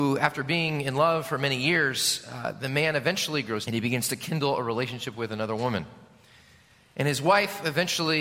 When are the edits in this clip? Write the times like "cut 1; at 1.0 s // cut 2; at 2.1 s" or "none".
cut 1; at 3.7 s